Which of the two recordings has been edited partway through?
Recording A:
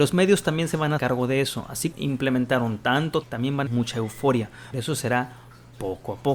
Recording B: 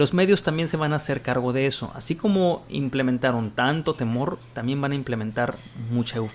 A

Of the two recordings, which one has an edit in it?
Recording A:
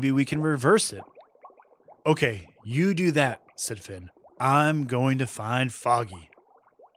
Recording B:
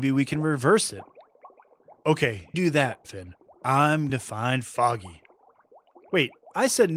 B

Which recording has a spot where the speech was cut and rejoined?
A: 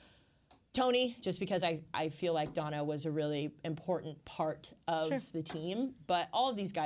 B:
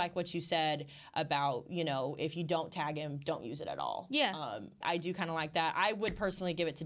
B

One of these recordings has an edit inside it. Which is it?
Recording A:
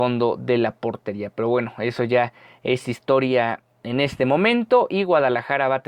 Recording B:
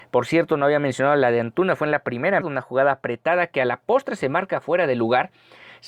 B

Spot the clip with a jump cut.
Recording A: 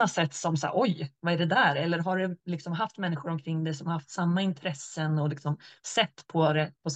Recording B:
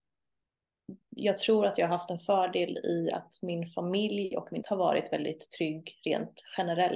B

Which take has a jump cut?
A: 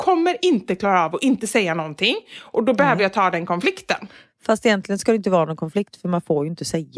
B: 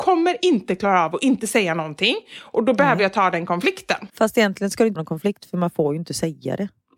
B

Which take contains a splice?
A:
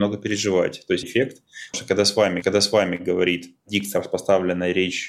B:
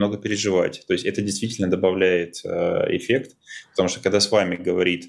A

